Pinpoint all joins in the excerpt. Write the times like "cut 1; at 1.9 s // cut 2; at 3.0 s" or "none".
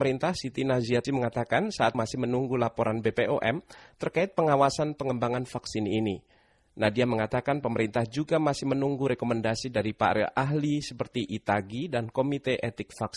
cut 1; at 1.0 s // cut 2; at 1.9 s